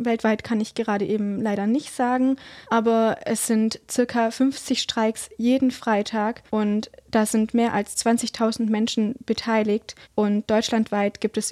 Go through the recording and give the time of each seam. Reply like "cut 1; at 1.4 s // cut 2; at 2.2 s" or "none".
cut 1; at 2.6 s // cut 2; at 6.5 s // cut 3; at 10.0 s